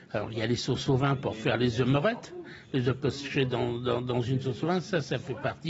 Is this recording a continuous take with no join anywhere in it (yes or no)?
yes